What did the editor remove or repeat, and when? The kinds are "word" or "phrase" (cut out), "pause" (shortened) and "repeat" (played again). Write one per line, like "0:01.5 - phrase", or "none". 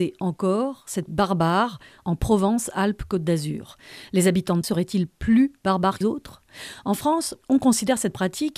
0:01.1 - word
0:04.6 - word
0:06.0 - word
0:07.4 - pause

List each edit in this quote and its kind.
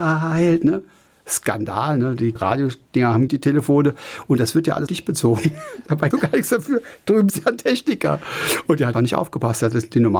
0:02.4 - word
0:03.3 - word
0:04.9 - word
0:06.1 - word
0:07.3 - word
0:08.9 - word

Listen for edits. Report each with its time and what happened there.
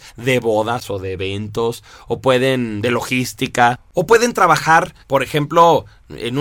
0:03.9 - pause
0:05.0 - pause

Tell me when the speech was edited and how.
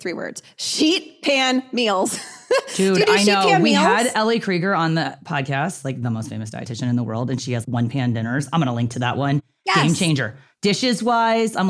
0:07.6 - word

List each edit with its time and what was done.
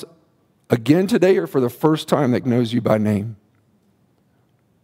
0:02.4 - word

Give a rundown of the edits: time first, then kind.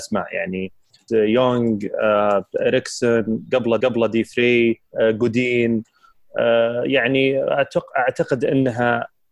0:01.1 - word
0:03.8 - repeat
0:04.9 - pause

